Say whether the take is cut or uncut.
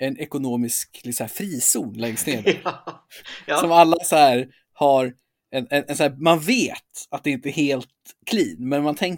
uncut